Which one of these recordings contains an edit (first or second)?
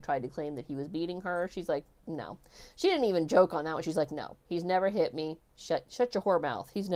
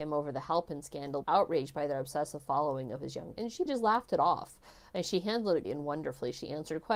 second